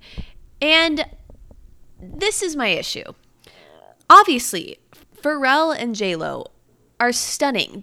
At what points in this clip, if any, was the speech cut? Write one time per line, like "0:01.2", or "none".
none